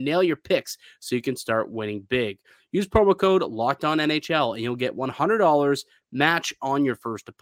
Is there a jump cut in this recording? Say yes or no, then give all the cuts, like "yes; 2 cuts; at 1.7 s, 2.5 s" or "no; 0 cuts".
no; 0 cuts